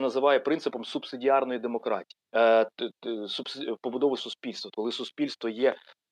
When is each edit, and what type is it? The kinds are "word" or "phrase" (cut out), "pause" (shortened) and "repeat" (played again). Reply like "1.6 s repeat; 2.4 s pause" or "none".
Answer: 2.2 s pause; 4.2 s word; 4.7 s phrase